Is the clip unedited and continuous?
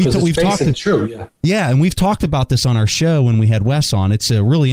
yes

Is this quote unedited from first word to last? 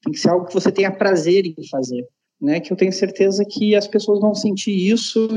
yes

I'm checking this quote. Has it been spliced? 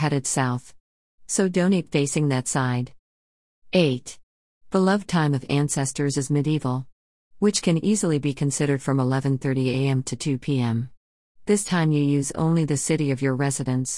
no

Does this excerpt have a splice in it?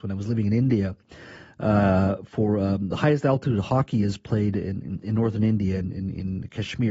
no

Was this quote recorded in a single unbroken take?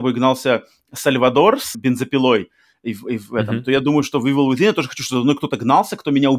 no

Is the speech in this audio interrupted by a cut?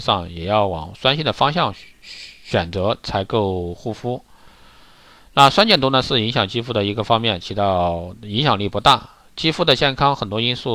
no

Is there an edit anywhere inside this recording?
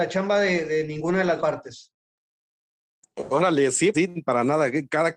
yes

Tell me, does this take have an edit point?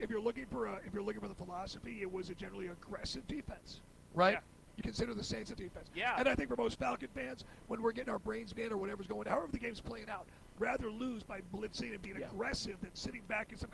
yes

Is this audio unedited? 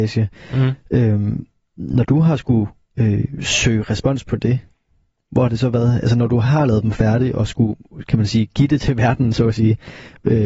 yes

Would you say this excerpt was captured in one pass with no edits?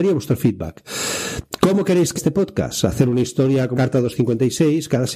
no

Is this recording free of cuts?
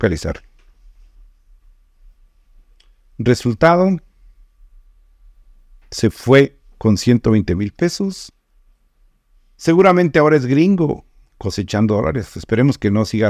yes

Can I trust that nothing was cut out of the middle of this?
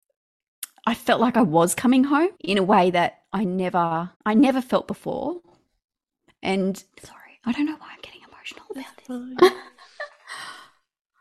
no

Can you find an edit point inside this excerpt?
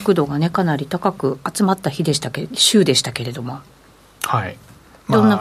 no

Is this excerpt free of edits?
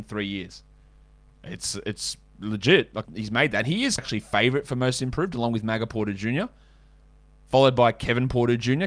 no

